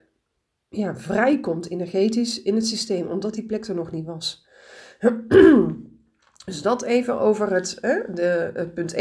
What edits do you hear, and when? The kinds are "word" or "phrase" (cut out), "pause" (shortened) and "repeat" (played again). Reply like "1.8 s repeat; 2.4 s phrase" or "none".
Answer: none